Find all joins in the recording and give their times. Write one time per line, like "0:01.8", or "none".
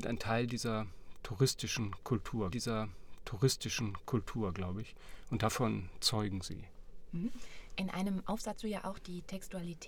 0:02.5
0:08.6